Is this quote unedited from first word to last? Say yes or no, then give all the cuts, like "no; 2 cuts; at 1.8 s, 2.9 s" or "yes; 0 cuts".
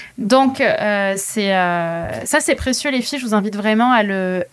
yes; 0 cuts